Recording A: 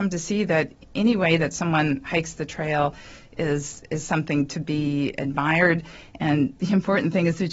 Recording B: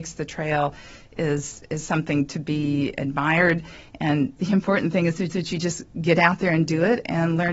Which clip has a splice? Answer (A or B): B